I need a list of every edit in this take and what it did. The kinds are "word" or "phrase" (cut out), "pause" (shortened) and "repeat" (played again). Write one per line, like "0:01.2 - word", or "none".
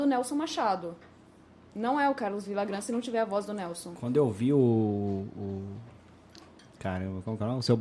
none

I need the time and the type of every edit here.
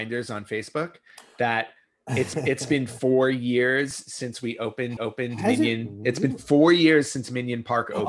0:02.3 - word
0:05.0 - repeat

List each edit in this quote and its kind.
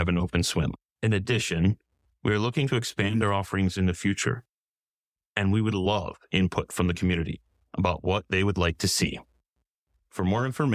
none

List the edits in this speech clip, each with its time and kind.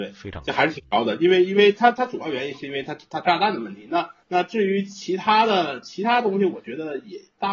0:04.2 - pause

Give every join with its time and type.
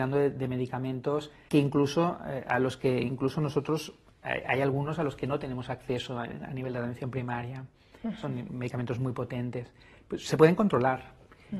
0:01.5 - word

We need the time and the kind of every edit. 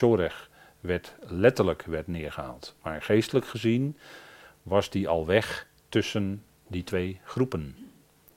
none

